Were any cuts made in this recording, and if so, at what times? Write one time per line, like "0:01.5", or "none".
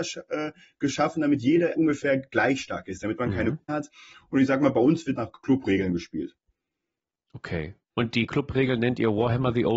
0:01.8
0:03.7
0:05.2